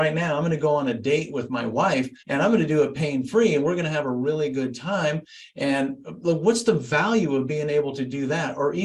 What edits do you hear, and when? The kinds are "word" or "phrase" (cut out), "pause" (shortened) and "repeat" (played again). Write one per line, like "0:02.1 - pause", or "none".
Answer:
0:02.2 - pause